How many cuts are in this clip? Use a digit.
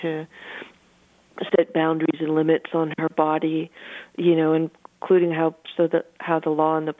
0